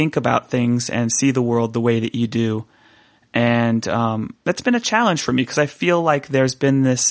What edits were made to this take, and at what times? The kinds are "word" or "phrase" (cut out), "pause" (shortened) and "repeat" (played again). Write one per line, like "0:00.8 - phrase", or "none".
none